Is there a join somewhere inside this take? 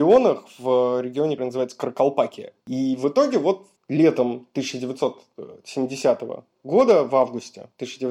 yes; 2 cuts; at 1.4 s, 3.8 s

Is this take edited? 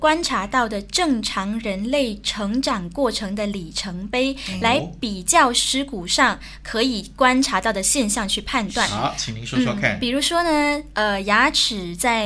no; 0 cuts

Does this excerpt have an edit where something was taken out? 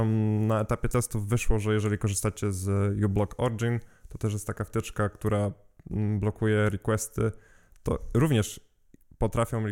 no; 0 cuts

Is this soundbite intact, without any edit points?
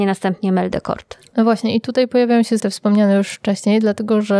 no; 1 cut; at 2.6 s

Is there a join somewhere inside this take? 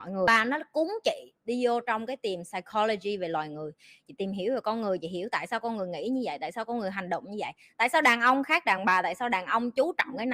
no; 0 cuts

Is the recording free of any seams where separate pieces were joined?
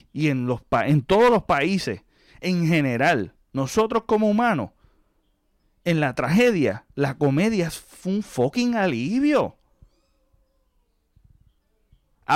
yes; 0 cuts

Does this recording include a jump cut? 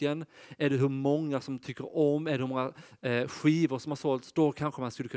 no; 0 cuts

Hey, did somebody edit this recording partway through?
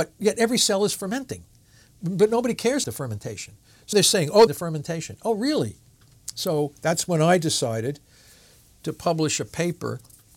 yes; 3 cuts; at 2.8 s, 3.9 s, 4.5 s

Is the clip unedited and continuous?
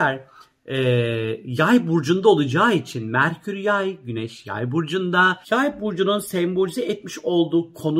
no; 1 cut; at 5.4 s

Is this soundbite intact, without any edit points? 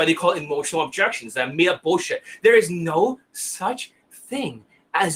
yes; 0 cuts

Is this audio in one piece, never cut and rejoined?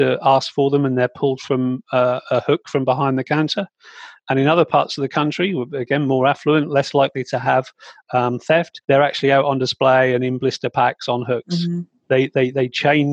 no; 1 cut; at 8.8 s

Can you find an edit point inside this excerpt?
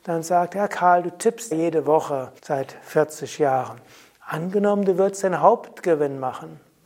yes; 2 cuts; at 1.5 s, 2.4 s

